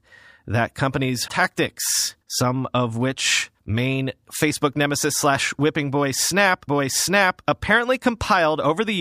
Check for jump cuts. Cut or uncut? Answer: cut